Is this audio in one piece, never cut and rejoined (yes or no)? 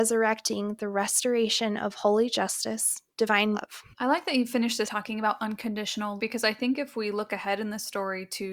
no